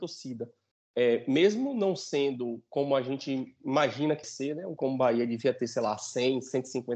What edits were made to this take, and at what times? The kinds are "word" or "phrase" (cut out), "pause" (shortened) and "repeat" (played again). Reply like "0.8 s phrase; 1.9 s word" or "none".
4.2 s word; 4.8 s word